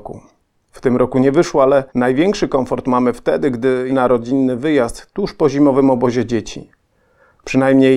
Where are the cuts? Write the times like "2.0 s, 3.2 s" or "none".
1.9 s, 3.9 s